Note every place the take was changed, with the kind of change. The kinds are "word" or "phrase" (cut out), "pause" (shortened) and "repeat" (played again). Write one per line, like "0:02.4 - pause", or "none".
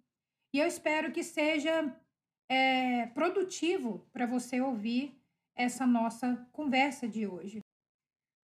none